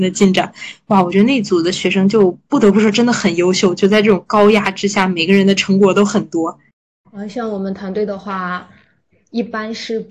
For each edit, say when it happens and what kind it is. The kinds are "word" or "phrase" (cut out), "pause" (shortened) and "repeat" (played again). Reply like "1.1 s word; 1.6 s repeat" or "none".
6.7 s pause